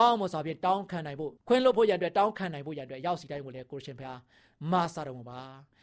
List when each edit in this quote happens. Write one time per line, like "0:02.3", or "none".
0:01.4